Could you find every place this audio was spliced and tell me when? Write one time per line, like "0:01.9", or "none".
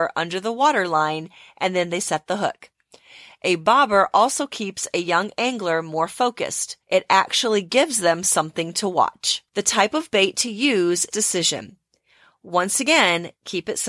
0:06.8
0:09.5
0:11.1